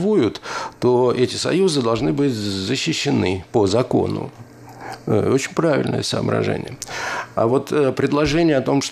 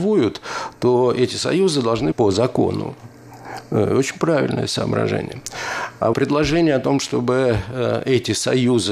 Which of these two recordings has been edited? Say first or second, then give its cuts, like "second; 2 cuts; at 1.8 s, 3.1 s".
second; 2 cuts; at 2.1 s, 6.1 s